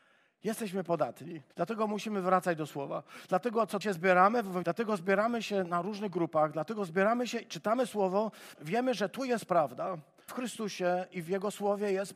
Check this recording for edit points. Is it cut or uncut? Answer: cut